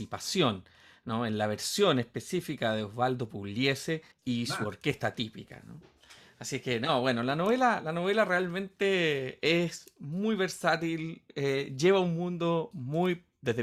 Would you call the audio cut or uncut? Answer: cut